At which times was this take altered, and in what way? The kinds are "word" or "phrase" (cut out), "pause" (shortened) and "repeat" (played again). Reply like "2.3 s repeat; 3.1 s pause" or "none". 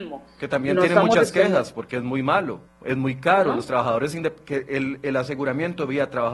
2.6 s pause